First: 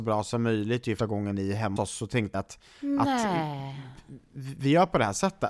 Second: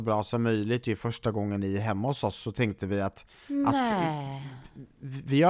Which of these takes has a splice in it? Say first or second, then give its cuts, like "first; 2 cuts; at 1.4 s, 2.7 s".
first; 3 cuts; at 1.0 s, 1.8 s, 2.3 s